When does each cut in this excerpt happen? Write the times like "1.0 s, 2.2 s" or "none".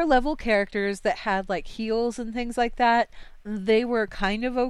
none